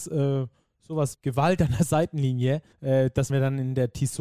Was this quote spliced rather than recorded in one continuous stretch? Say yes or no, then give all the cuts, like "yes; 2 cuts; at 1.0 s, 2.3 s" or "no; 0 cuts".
yes; 3 cuts; at 1.1 s, 2.7 s, 3.3 s